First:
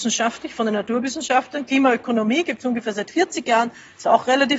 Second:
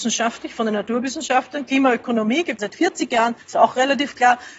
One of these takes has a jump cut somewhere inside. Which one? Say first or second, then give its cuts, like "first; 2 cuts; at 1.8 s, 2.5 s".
second; 2 cuts; at 2.6 s, 3.4 s